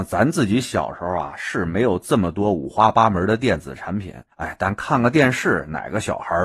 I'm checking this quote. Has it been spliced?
yes; 1 cut; at 4.3 s

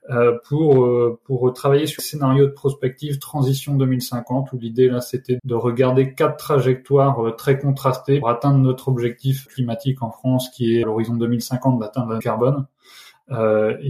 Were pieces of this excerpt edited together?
yes; 6 cuts; at 2.0 s, 5.4 s, 8.2 s, 9.5 s, 10.8 s, 12.2 s

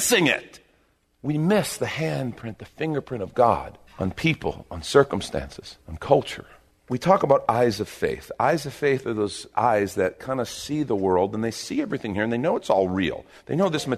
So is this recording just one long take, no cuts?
no; 3 cuts; at 3.9 s, 5.8 s, 6.7 s

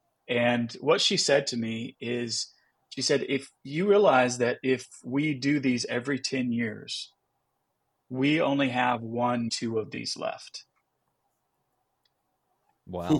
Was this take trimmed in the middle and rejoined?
yes; 1 cut; at 9.5 s

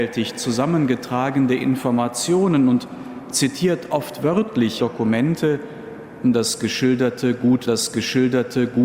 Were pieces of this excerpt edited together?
yes; 2 cuts; at 4.8 s, 7.7 s

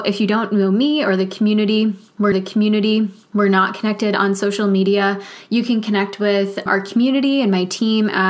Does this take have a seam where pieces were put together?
yes; 2 cuts; at 2.3 s, 6.7 s

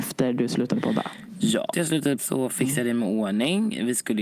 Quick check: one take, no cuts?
no; 2 cuts; at 1.7 s, 2.2 s

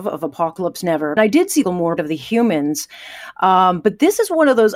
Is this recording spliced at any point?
yes; 3 cuts; at 1.2 s, 1.6 s, 2.0 s

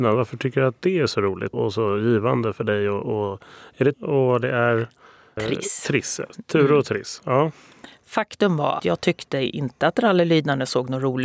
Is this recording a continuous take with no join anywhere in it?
no; 4 cuts; at 1.5 s, 3.9 s, 5.4 s, 8.8 s

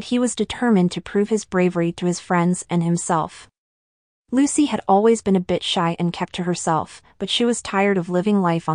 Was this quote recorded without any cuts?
yes; 0 cuts

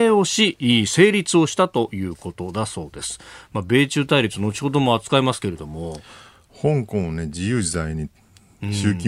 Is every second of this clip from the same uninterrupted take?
yes; 0 cuts

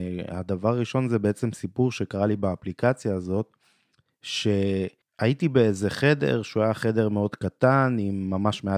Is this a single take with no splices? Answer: no; 1 cut; at 5.0 s

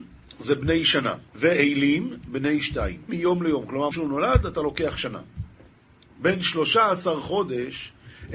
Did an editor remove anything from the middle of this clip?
yes; 3 cuts; at 1.3 s, 3.1 s, 3.9 s

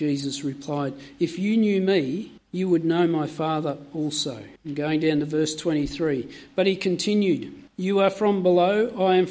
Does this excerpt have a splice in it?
yes; 3 cuts; at 2.4 s, 4.6 s, 7.7 s

